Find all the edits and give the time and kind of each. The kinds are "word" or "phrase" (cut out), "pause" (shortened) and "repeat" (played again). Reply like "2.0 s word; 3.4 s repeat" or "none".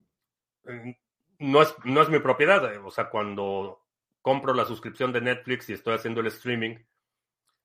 none